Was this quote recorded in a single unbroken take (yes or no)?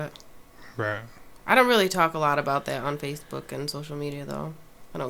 yes